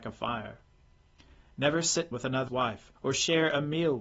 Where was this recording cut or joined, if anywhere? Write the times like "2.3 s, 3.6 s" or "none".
2.1 s, 2.5 s, 3.0 s